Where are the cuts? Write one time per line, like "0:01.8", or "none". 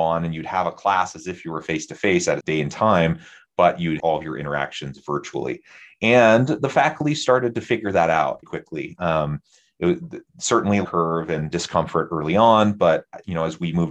0:02.4
0:03.5
0:04.0
0:08.4
0:10.8
0:11.5

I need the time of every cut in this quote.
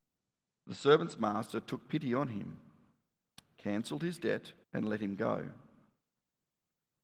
0:04.6

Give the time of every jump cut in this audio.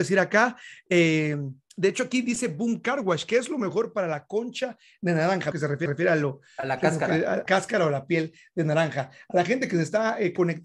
0:01.7
0:05.5
0:05.9
0:07.5

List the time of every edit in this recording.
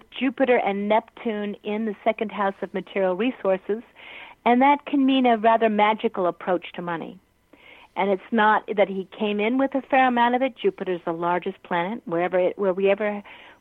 none

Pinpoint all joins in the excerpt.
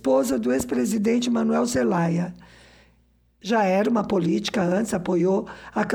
none

